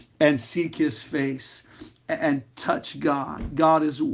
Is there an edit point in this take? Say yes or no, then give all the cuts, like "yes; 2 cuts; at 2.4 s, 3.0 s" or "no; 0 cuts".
no; 0 cuts